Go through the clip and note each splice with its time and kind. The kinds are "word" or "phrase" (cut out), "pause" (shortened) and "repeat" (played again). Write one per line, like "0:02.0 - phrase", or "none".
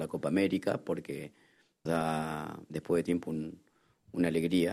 0:01.9 - word
0:03.0 - word